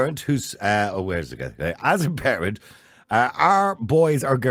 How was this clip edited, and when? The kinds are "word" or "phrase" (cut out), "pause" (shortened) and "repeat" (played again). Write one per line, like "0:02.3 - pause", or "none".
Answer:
none